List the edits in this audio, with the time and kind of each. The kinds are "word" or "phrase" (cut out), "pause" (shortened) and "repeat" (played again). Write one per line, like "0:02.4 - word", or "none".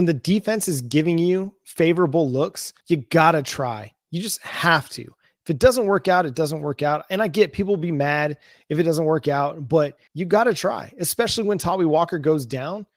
0:02.8 - pause
0:10.1 - pause